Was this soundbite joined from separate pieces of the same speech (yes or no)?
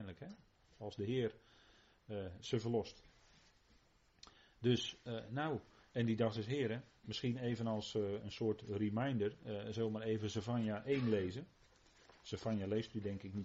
no